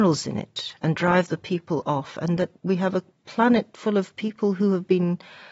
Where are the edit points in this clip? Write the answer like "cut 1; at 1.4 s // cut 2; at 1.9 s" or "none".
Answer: cut 1; at 2.6 s